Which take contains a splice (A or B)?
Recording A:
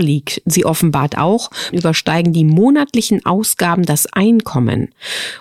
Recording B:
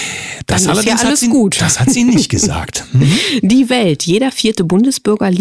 A